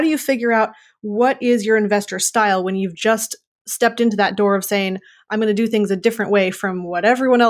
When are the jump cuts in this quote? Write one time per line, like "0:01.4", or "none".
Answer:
none